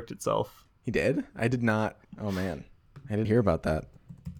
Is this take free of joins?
no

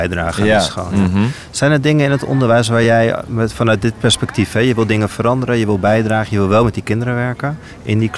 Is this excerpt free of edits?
yes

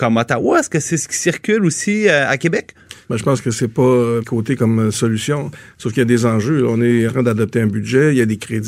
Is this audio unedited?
no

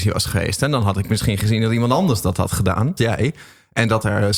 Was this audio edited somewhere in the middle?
yes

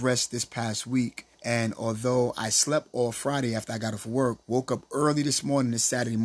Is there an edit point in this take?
yes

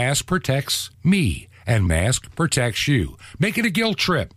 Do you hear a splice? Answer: yes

